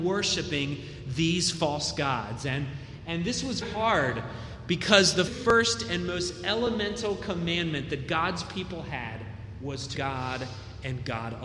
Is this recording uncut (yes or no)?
no